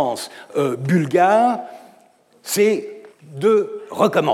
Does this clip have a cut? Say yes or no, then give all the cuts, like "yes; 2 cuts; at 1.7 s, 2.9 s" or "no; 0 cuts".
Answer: yes; 1 cut; at 3.1 s